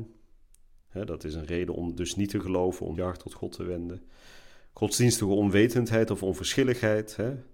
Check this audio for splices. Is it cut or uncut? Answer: cut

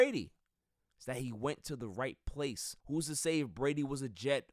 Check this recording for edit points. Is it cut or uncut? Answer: cut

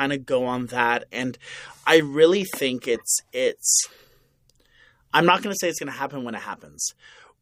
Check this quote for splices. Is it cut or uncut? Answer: uncut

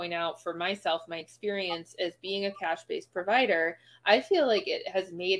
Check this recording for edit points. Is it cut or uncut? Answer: uncut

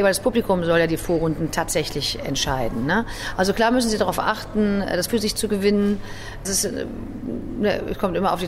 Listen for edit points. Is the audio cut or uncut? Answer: cut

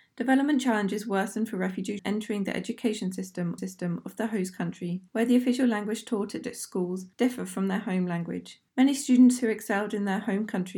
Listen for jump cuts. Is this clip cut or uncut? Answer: cut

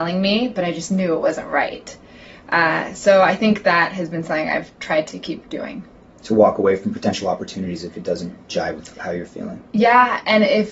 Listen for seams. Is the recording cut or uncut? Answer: uncut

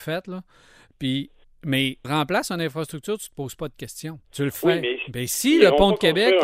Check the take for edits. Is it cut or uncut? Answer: cut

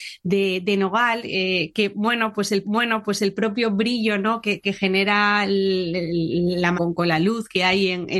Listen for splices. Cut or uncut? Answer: cut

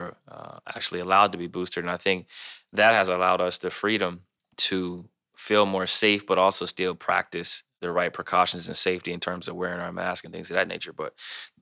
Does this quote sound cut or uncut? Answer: uncut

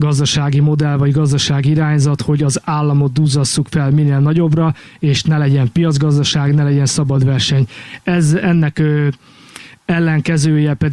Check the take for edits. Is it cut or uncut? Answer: uncut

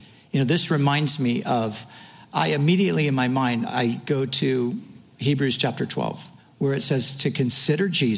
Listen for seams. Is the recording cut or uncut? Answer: cut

